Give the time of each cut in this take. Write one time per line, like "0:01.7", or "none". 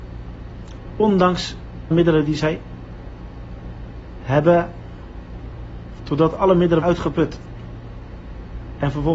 0:01.9
0:06.0
0:06.8